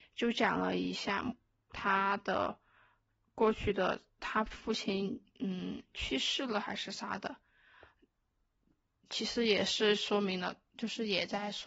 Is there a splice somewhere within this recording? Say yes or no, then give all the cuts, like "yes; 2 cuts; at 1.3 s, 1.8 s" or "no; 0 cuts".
no; 0 cuts